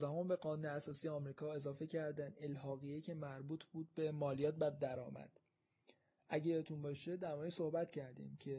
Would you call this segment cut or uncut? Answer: uncut